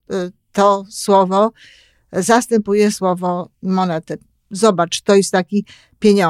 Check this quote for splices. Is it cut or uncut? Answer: uncut